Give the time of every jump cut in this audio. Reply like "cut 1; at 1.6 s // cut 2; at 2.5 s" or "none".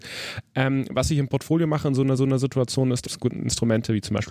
cut 1; at 2.2 s // cut 2; at 3.1 s